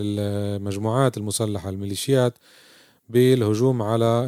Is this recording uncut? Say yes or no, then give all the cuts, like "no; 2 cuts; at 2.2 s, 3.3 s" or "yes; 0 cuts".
yes; 0 cuts